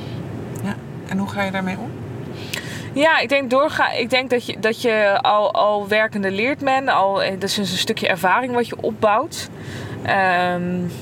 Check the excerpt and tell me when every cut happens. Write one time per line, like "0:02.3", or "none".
none